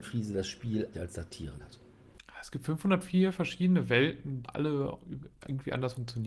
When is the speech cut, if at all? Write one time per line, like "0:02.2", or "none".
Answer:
0:00.9
0:01.6
0:04.4